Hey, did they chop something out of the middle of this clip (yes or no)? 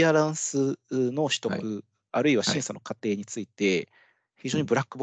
no